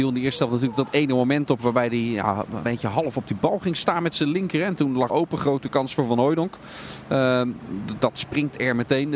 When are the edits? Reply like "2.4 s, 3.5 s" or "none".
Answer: 2.6 s, 5.1 s